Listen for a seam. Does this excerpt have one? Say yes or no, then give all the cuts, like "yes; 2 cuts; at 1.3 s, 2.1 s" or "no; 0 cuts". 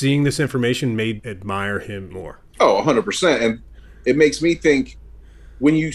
yes; 3 cuts; at 1.2 s, 2.1 s, 2.5 s